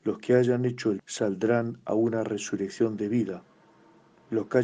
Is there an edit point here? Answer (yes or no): yes